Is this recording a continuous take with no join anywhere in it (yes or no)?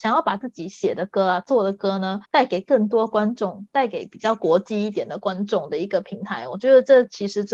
no